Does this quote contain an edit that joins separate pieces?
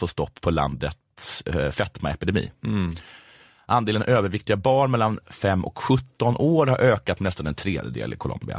no; 0 cuts

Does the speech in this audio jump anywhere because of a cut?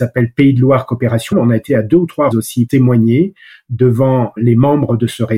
yes; 5 cuts; at 1.3 s, 1.7 s, 2.3 s, 2.7 s, 4.4 s

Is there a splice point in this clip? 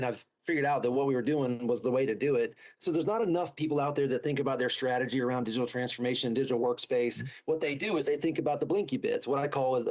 no; 0 cuts

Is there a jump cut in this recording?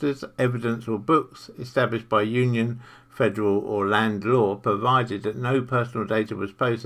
no; 0 cuts

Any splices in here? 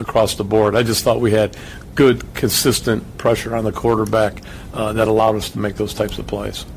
no; 0 cuts

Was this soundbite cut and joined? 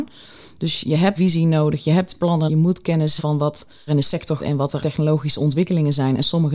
yes; 6 cuts; at 1.2 s, 2.5 s, 3.2 s, 3.9 s, 4.4 s, 4.8 s

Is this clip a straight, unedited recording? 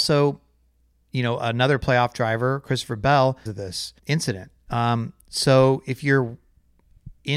no; 2 cuts; at 3.5 s, 4.0 s

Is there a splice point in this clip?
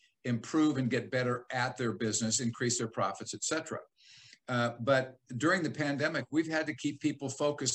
no; 0 cuts

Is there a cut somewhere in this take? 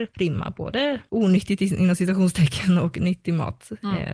yes; 1 cut; at 1.1 s

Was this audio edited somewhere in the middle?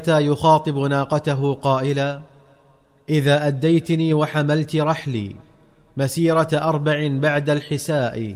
no; 0 cuts

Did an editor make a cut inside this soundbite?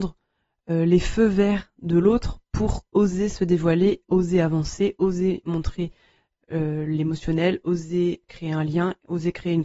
no; 0 cuts

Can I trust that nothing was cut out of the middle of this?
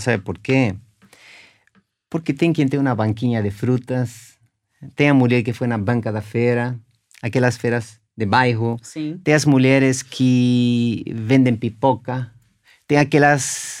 yes; 0 cuts

